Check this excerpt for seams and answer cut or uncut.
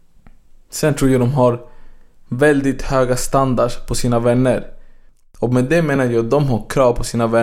uncut